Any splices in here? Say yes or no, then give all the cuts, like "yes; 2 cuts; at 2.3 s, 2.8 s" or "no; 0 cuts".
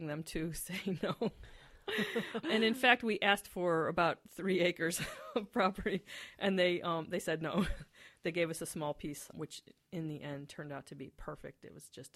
yes; 2 cuts; at 2.4 s, 9.3 s